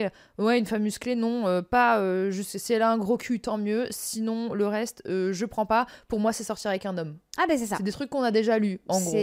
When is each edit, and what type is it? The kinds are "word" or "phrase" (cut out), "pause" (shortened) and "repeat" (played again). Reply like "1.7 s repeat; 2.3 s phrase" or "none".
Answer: none